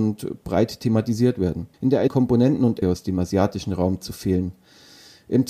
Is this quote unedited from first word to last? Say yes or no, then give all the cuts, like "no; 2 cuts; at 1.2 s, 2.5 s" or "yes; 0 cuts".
no; 3 cuts; at 1.7 s, 2.1 s, 2.8 s